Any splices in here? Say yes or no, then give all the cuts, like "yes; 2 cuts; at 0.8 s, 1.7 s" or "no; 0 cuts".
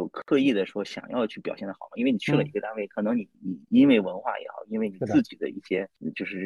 yes; 1 cut; at 3.3 s